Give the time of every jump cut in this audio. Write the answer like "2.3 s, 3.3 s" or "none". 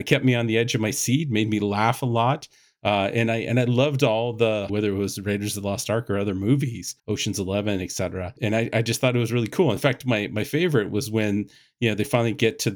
4.7 s, 7.0 s